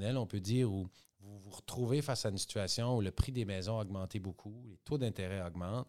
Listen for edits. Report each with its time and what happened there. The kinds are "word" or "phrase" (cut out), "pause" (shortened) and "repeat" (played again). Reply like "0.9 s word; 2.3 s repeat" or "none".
none